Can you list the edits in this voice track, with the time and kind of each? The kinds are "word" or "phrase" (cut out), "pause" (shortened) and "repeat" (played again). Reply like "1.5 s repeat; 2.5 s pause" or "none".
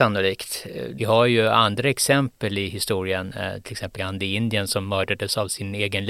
4.0 s word